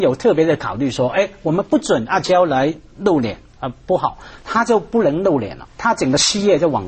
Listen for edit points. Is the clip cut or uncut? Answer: uncut